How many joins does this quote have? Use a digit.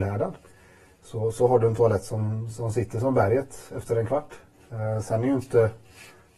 0